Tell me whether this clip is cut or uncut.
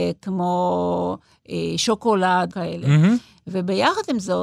cut